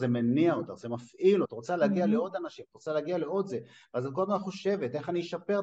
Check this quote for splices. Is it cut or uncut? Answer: cut